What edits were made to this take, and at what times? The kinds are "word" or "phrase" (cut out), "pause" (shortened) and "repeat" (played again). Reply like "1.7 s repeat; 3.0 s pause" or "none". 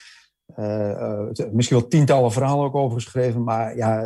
none